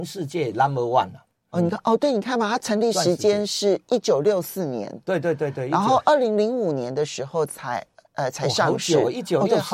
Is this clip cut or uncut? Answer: uncut